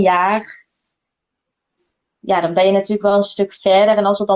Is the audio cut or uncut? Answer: uncut